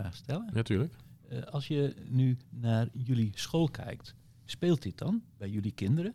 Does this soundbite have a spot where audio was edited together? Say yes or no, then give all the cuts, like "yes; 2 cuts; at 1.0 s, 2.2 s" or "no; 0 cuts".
no; 0 cuts